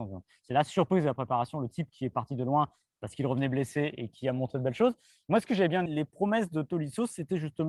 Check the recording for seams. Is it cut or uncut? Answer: cut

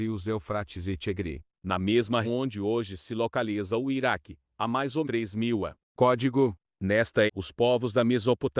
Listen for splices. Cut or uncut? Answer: cut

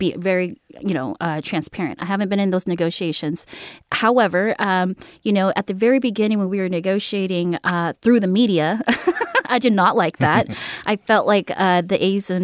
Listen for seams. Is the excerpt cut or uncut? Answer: uncut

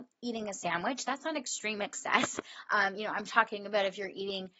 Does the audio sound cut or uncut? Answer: uncut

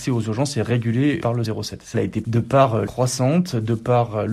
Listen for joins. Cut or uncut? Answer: cut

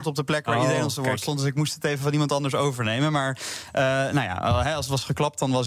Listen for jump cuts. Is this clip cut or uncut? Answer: uncut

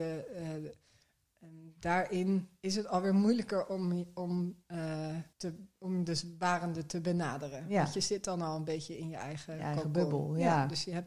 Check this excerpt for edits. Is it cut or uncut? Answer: cut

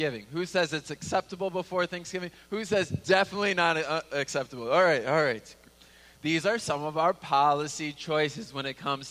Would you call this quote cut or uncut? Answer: uncut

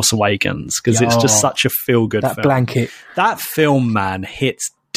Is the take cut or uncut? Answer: uncut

